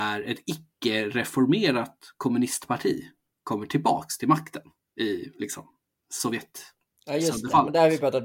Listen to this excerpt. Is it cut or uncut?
uncut